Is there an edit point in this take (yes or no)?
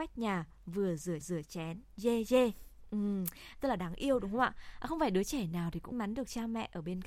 yes